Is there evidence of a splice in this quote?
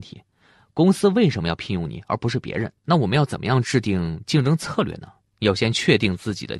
yes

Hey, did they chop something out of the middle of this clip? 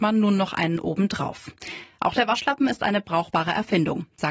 no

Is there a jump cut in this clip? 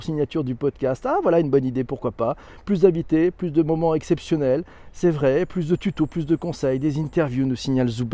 no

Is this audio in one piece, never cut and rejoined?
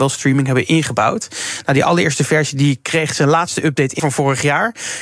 no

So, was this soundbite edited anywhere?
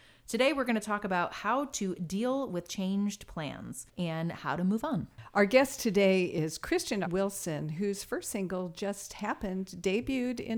yes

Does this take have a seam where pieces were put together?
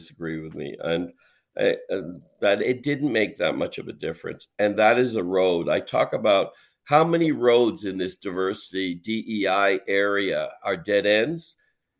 no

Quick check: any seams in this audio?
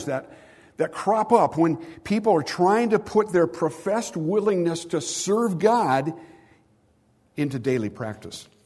no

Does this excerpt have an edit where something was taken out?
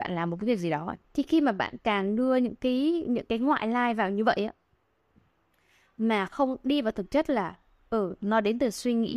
yes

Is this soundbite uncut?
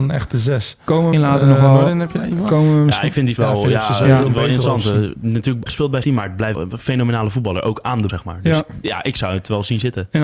no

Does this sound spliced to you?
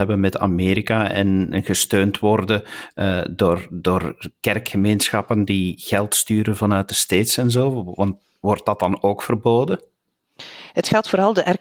no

